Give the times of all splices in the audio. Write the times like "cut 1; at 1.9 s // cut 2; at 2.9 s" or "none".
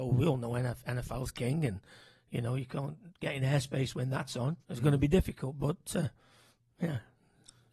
cut 1; at 4.6 s

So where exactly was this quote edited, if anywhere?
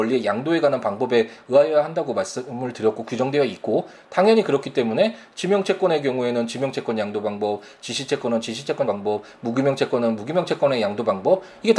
cut 1; at 8.9 s

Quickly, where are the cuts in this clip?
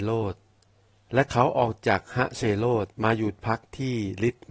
cut 1; at 2.9 s

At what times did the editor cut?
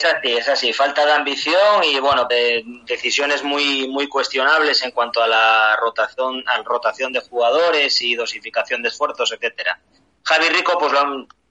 cut 1; at 2.3 s

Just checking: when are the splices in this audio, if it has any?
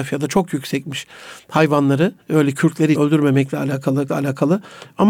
cut 1; at 2.2 s // cut 2; at 2.9 s // cut 3; at 4.1 s

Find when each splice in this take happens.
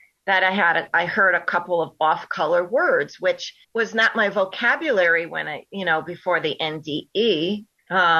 cut 1; at 3.6 s

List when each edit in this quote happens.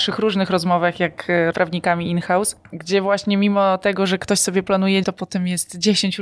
cut 1; at 1.5 s // cut 2; at 2.6 s // cut 3; at 5.0 s

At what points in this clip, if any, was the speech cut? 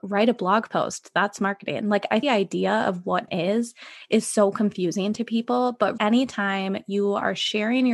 cut 1; at 2.2 s // cut 2; at 3.3 s // cut 3; at 6.0 s

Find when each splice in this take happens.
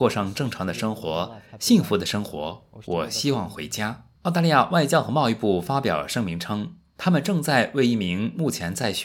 cut 1; at 4.2 s

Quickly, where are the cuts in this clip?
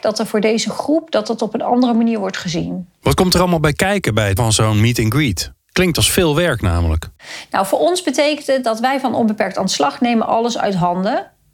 cut 1; at 4.4 s

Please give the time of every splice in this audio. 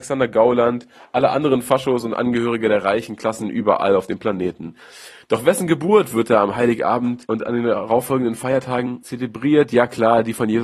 none

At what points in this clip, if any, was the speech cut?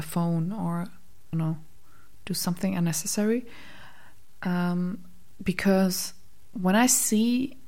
cut 1; at 1.3 s

